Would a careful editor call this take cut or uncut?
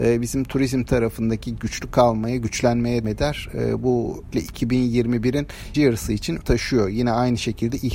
cut